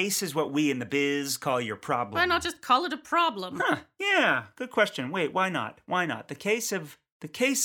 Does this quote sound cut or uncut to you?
uncut